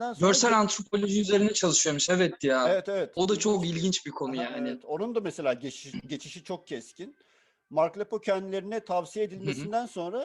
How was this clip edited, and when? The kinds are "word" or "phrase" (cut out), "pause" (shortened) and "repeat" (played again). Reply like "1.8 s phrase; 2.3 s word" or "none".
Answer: none

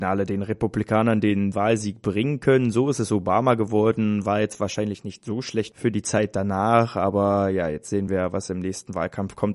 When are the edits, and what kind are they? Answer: none

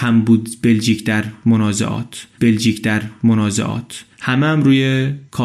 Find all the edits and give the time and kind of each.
2.4 s repeat

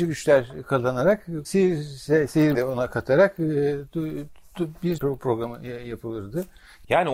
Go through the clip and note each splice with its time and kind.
1.4 s word; 2.5 s word; 5.0 s word

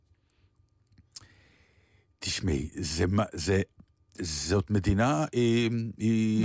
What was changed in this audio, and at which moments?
none

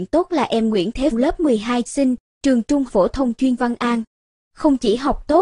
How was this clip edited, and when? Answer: 1.1 s word; 1.9 s word; 2.9 s word; 3.6 s word

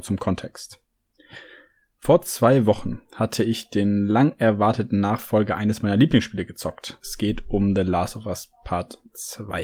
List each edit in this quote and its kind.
none

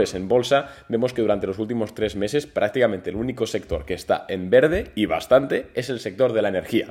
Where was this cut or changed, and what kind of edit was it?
none

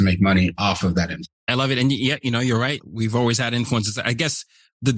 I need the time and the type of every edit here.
none

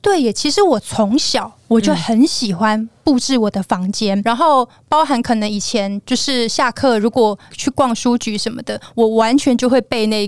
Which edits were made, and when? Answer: 4.2 s word

